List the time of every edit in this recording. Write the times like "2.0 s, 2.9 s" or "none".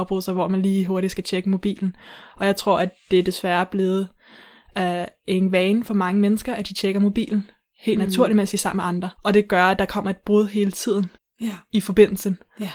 9.1 s, 11.1 s